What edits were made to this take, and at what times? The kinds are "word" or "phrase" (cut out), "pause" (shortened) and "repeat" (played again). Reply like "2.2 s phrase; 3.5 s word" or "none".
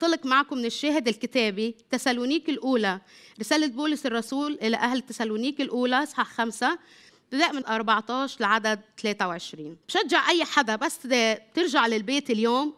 7.6 s word; 9.8 s pause